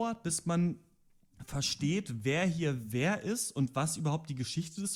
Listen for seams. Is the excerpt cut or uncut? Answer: uncut